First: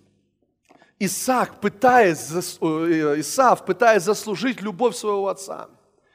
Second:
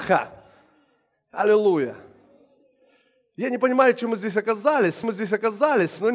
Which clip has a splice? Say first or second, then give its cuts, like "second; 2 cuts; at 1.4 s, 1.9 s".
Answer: second; 1 cut; at 5.0 s